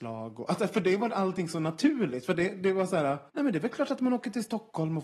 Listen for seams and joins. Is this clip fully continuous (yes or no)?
no